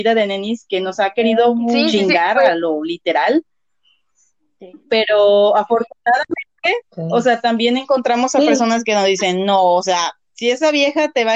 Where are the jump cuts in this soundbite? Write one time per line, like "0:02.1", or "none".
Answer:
none